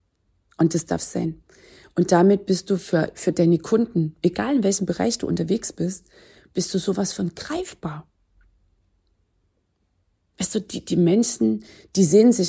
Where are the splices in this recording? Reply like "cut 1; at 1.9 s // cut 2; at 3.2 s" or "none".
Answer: none